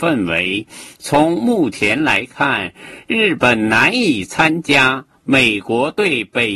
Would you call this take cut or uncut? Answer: uncut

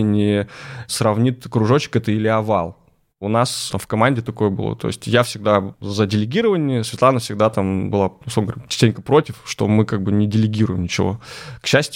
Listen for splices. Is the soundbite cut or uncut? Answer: cut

